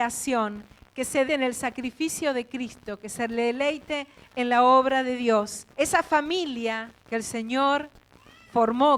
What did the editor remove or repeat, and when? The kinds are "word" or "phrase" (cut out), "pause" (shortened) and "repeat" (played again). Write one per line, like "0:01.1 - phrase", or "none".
0:01.3 - word
0:05.7 - pause
0:07.0 - pause